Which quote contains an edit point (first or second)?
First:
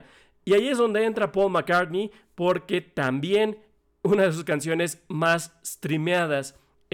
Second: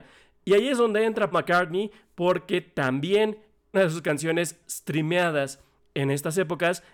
second